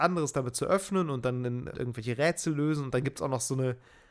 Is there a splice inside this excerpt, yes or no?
yes